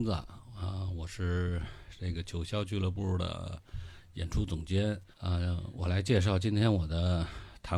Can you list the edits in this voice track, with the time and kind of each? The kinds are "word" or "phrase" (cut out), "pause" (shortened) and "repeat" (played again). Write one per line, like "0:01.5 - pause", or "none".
0:05.1 - pause